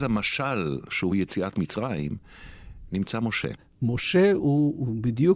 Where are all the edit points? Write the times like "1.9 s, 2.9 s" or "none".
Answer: none